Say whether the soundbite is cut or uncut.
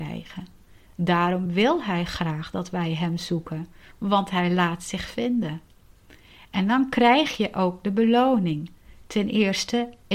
uncut